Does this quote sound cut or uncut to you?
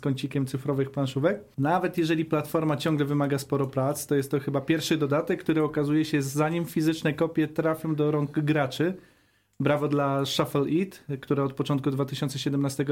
uncut